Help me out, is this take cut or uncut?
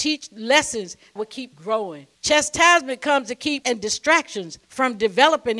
cut